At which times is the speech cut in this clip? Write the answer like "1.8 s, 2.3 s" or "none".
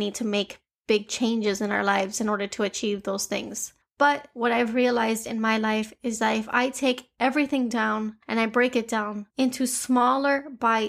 3.8 s, 8.2 s, 9.3 s